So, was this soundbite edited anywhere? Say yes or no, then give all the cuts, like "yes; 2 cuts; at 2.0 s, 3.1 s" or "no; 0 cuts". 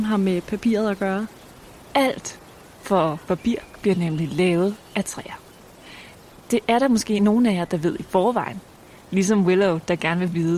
no; 0 cuts